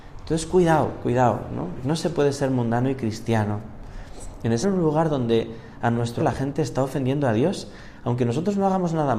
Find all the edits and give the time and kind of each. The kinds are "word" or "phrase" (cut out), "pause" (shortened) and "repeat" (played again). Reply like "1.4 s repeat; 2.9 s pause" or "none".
4.6 s phrase; 6.2 s word